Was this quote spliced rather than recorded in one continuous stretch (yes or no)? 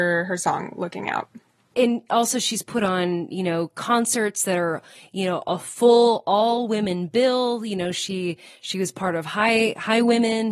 no